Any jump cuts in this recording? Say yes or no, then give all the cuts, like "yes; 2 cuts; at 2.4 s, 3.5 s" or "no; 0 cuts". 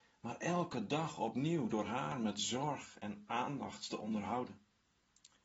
no; 0 cuts